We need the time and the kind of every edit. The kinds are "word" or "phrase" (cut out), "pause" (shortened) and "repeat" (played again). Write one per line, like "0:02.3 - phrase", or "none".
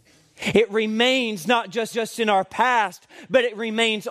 0:01.9 - repeat